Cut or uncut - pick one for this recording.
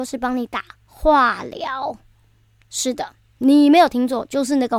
uncut